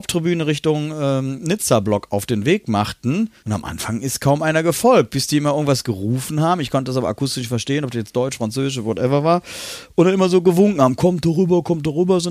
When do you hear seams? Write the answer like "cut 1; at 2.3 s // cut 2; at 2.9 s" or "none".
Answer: cut 1; at 3.4 s